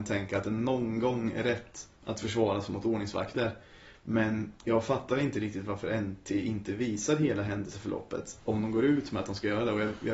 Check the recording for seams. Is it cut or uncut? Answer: cut